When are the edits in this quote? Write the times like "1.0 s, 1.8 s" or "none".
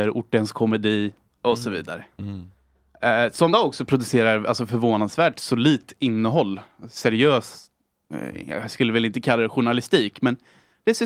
3.5 s